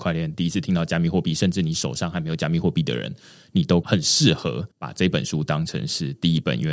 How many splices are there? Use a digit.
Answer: 1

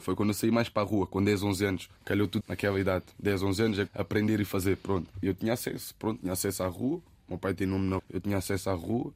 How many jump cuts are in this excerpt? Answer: 5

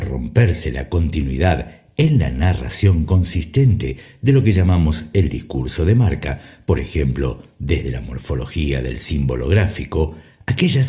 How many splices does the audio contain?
0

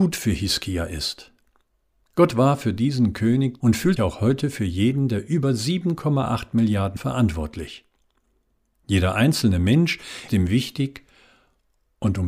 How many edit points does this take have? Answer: 4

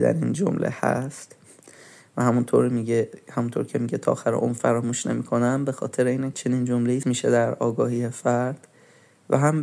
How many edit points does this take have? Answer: 2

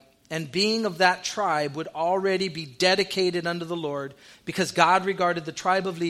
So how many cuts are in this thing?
0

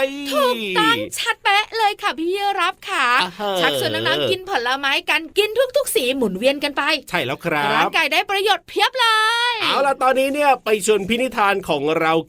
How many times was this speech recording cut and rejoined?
1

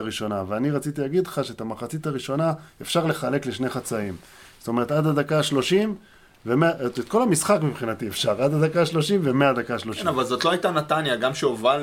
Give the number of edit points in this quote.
0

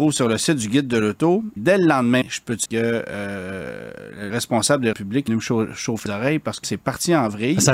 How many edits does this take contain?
8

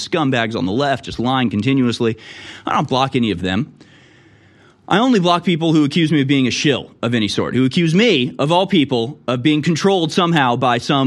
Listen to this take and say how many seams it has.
0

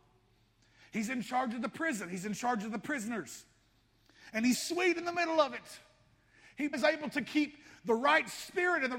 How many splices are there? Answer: 2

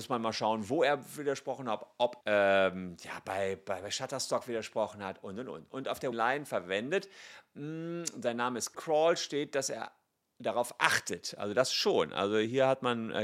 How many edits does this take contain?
3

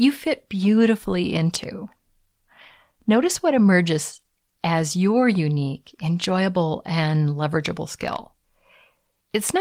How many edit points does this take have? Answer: 0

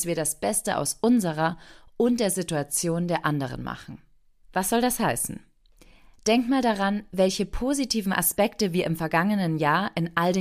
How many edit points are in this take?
0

